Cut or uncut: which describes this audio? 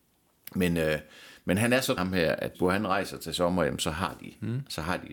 cut